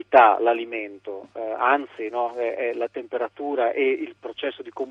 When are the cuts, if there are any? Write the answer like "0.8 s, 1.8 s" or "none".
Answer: none